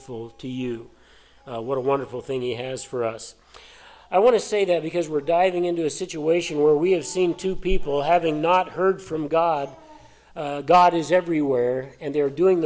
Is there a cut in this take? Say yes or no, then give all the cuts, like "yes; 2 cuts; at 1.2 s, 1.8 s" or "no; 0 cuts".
no; 0 cuts